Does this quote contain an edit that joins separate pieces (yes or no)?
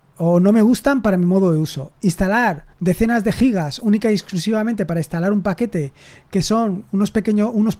yes